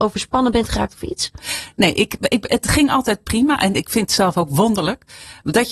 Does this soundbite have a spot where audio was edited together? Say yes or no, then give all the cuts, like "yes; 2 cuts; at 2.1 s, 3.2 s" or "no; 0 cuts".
no; 0 cuts